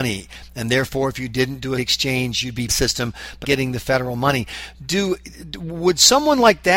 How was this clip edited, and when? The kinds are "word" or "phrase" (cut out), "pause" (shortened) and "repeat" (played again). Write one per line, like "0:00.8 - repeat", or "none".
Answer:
0:01.8 - word
0:02.7 - phrase
0:03.4 - word